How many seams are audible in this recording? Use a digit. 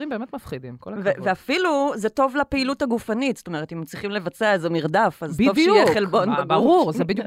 0